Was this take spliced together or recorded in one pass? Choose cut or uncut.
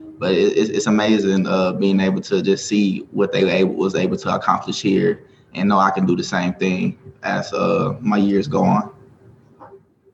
uncut